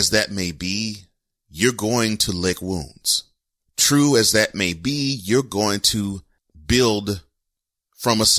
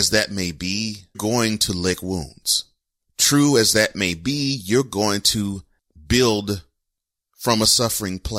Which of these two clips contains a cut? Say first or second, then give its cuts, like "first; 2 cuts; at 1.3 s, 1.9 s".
second; 1 cut; at 1.1 s